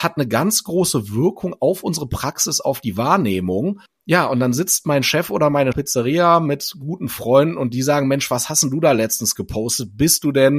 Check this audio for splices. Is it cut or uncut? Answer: cut